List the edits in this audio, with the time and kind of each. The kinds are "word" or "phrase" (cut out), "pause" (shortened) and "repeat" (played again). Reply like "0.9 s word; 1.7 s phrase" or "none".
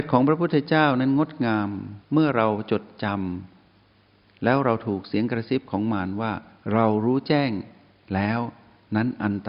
none